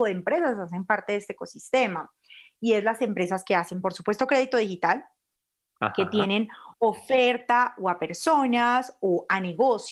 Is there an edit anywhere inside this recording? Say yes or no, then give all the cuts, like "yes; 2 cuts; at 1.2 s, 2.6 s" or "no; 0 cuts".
no; 0 cuts